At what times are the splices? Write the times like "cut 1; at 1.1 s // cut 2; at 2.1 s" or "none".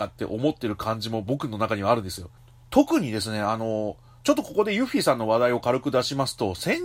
none